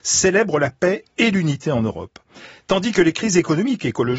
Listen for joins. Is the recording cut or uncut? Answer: uncut